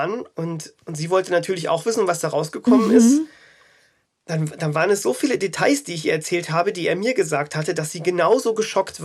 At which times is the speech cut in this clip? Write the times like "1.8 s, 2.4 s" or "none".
none